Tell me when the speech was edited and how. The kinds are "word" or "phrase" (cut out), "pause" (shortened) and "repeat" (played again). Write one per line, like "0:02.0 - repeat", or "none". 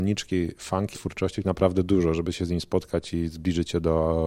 0:00.9 - word
0:01.4 - phrase